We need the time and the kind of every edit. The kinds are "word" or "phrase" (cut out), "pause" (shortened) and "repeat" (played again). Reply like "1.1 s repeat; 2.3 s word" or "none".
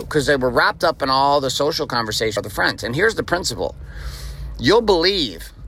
2.4 s phrase